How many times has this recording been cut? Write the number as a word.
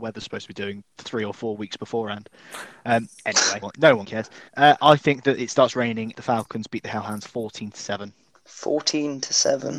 five